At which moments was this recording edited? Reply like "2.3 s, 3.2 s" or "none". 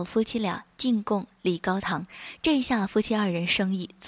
none